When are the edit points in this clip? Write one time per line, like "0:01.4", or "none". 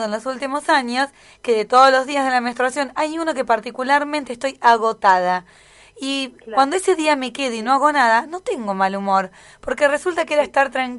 none